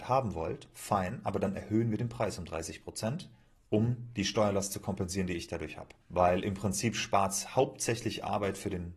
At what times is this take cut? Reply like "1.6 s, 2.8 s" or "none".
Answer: 6.0 s